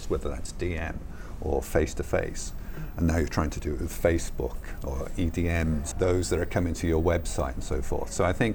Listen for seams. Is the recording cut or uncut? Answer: cut